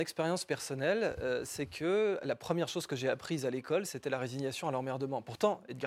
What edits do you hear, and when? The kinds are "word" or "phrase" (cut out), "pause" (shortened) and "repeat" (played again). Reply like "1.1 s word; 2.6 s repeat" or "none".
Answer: none